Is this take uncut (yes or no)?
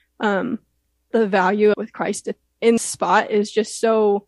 no